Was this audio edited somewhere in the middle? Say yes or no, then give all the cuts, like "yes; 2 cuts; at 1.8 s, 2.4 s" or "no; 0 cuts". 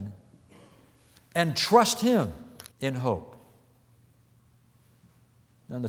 yes; 1 cut; at 2.7 s